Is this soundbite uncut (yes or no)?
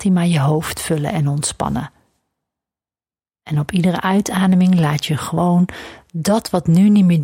yes